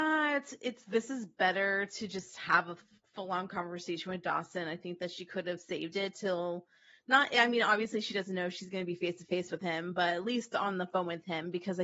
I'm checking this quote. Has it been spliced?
no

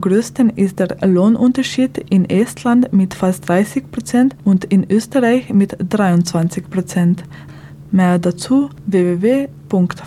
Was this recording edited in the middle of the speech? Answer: no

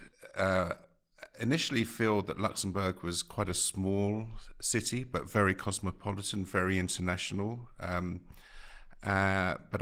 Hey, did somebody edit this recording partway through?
no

